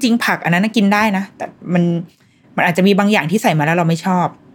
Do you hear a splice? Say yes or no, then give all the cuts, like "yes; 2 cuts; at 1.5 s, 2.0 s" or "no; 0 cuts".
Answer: no; 0 cuts